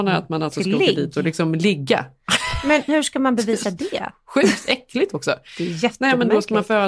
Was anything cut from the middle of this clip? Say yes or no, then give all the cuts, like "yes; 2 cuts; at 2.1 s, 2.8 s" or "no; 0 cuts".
yes; 1 cut; at 2.9 s